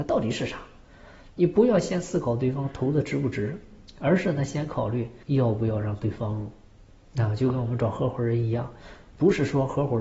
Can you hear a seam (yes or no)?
yes